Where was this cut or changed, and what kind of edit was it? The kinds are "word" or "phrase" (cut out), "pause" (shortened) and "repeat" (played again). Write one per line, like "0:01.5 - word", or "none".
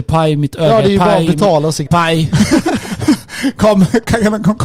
0:01.9 - phrase

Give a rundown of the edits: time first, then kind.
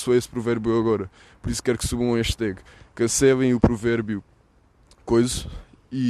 none

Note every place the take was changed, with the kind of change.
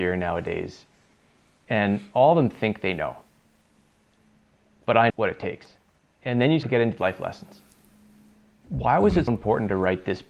0:05.1 - word
0:06.6 - word
0:07.0 - word
0:09.3 - word

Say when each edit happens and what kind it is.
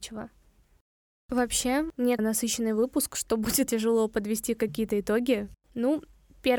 0:02.2 - phrase
0:03.7 - word

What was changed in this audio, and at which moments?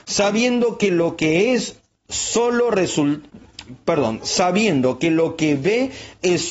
none

